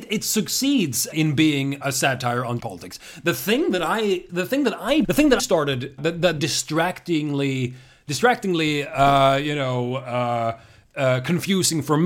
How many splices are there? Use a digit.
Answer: 8